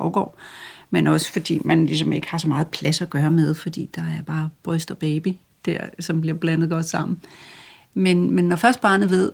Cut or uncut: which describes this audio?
uncut